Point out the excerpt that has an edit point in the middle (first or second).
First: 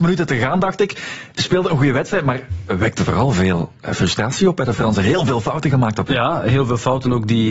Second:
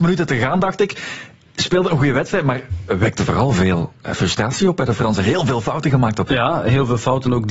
first